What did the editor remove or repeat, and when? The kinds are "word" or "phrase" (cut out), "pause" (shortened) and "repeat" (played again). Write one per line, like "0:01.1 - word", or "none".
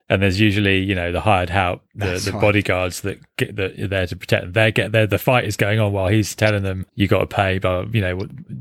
0:06.9 - pause